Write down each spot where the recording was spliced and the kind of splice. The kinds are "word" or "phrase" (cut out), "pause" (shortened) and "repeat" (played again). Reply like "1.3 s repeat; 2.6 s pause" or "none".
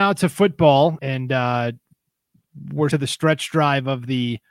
1.0 s word; 2.9 s phrase